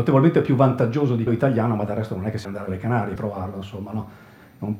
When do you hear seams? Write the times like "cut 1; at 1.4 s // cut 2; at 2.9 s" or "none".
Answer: cut 1; at 1.3 s // cut 2; at 2.4 s // cut 3; at 3.2 s